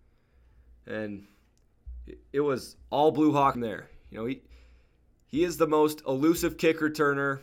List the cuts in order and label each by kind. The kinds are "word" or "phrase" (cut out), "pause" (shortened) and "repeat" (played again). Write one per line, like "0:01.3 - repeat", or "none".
0:03.5 - word